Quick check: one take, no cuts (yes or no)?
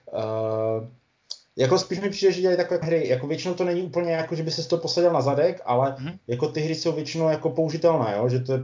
no